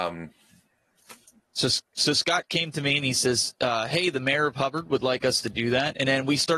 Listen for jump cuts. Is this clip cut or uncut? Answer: cut